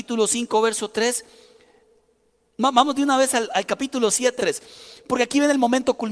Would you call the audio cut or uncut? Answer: cut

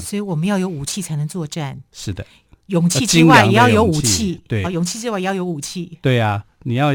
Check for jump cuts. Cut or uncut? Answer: cut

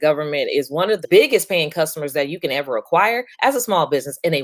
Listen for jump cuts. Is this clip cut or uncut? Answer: cut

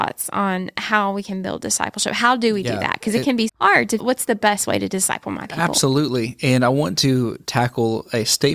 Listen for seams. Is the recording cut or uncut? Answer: cut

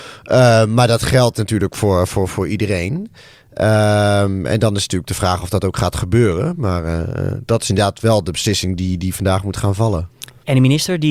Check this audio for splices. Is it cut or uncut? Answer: uncut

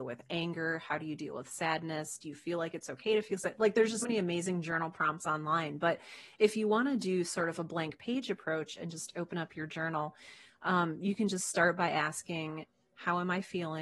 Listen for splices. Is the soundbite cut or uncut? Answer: cut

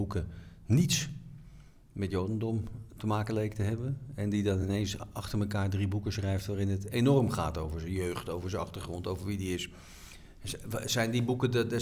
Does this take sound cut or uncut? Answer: uncut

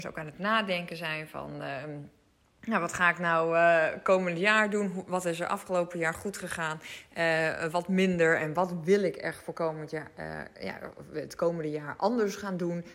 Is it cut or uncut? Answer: uncut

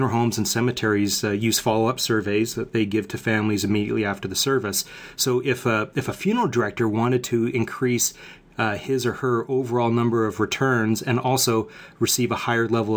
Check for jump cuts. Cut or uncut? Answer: uncut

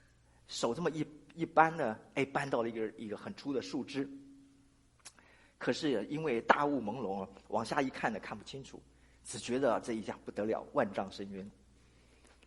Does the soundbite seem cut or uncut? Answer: uncut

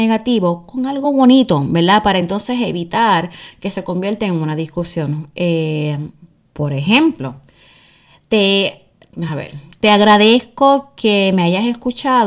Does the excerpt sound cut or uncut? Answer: uncut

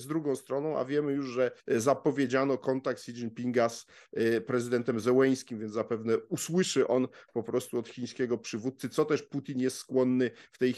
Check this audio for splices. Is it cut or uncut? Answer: cut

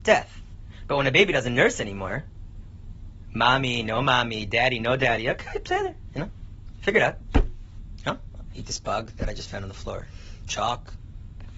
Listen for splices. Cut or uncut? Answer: uncut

